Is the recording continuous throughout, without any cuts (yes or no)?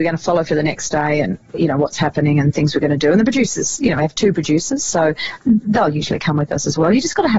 yes